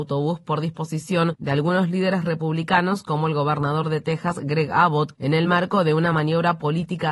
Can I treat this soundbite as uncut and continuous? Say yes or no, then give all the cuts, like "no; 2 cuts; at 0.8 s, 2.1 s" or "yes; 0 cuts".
yes; 0 cuts